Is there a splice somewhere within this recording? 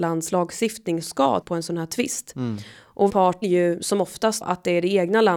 yes; 5 cuts; at 1.0 s, 1.4 s, 3.1 s, 3.4 s, 4.4 s

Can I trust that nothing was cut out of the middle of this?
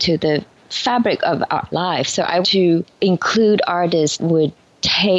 no; 3 cuts; at 1.7 s, 2.4 s, 4.2 s

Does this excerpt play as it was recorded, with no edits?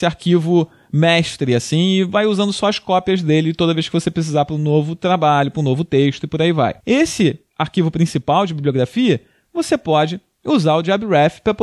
yes; 0 cuts

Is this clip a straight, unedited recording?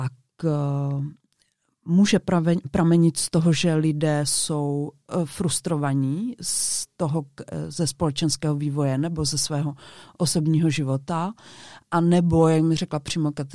yes; 0 cuts

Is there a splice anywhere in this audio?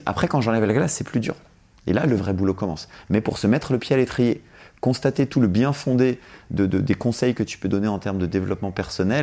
no; 0 cuts

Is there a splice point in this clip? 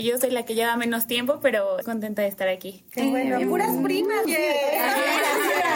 yes; 2 cuts; at 1.8 s, 4.2 s

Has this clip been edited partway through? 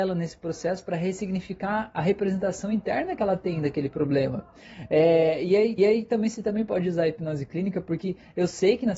yes; 1 cut; at 5.8 s

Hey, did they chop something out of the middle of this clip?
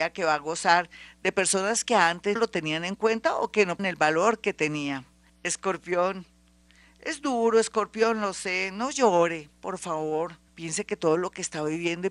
yes; 4 cuts; at 2.4 s, 3.8 s, 5.3 s, 10.5 s

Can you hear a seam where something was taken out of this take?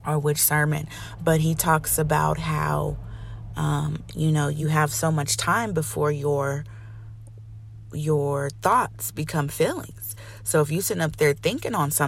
no; 0 cuts

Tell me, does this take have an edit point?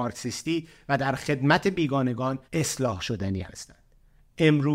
yes; 1 cut; at 2.4 s

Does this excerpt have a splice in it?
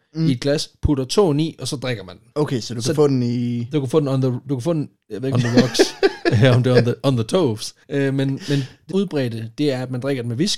yes; 4 cuts; at 2.3 s, 5.3 s, 7.8 s, 8.9 s

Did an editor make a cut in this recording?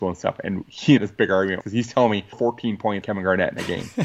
yes; 4 cuts; at 1.0 s, 1.6 s, 2.3 s, 3.0 s

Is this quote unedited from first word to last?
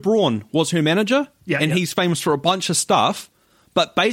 yes; 0 cuts

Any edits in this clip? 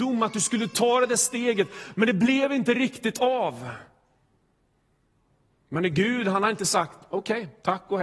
no; 0 cuts

